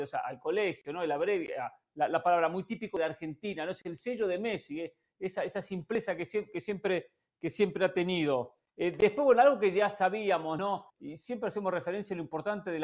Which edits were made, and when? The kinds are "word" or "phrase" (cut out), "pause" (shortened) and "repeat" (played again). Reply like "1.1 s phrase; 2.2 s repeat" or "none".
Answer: 8.7 s pause; 10.9 s pause

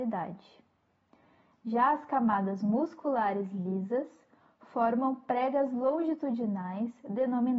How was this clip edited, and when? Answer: none

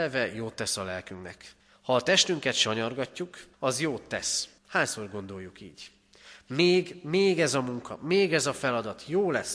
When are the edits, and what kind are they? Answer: 1.6 s pause; 3.5 s pause; 4.6 s pause

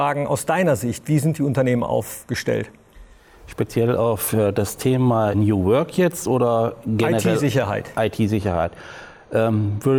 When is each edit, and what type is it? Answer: 5.3 s word

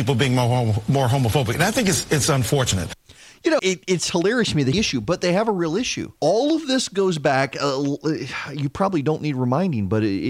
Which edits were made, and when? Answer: 3.6 s word; 4.7 s phrase; 6.2 s pause

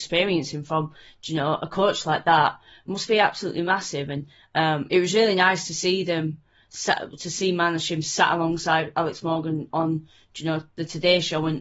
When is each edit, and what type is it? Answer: none

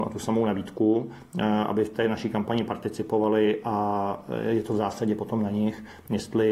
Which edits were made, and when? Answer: none

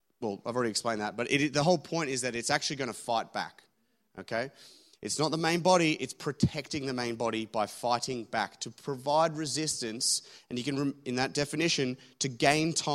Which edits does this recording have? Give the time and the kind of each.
none

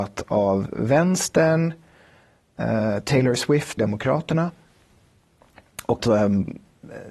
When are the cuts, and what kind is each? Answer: 3.8 s word; 6.0 s word

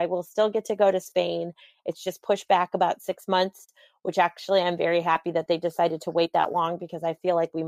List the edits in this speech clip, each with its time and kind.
none

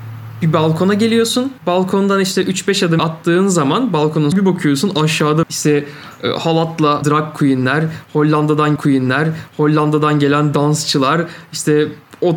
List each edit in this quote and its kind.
1.6 s pause; 3.0 s word; 4.3 s phrase; 5.4 s word; 7.0 s word; 8.8 s repeat

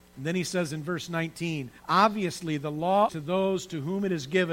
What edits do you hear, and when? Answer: 1.8 s pause; 3.1 s word

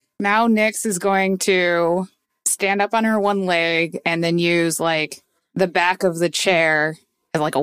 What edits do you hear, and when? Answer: none

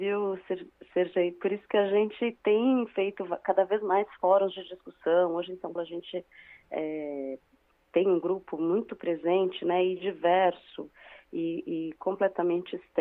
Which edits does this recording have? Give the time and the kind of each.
5.8 s word

